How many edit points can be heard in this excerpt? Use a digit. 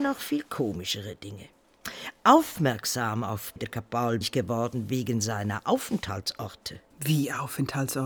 3